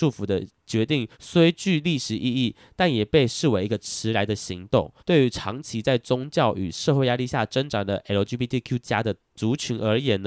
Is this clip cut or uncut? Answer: cut